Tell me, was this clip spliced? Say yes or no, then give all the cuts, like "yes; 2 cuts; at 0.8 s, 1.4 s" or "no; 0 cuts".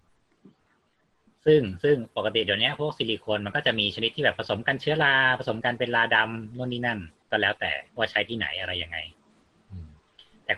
yes; 1 cut; at 7.9 s